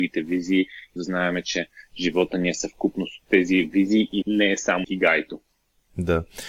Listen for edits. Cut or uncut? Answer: cut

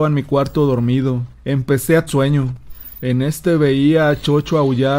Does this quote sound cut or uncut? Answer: cut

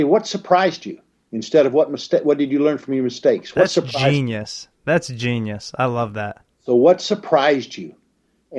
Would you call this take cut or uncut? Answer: uncut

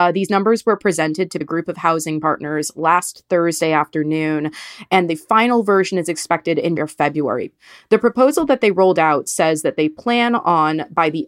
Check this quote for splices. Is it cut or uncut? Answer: cut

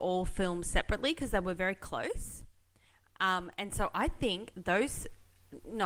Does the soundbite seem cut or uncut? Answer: uncut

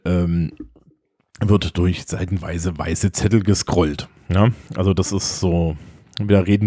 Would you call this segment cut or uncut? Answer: cut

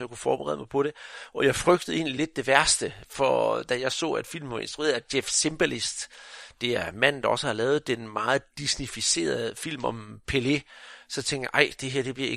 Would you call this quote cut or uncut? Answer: uncut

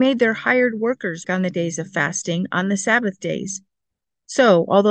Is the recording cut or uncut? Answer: cut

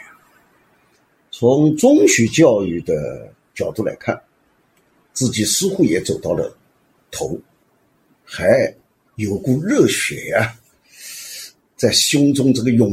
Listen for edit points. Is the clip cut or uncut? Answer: uncut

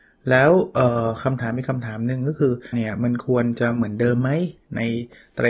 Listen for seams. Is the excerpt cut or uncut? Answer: cut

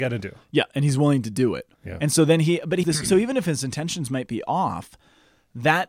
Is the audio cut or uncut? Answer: cut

